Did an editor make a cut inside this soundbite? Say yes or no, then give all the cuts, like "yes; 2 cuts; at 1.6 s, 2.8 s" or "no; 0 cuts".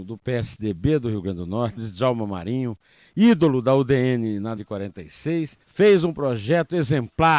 yes; 3 cuts; at 1.8 s, 4.6 s, 5.6 s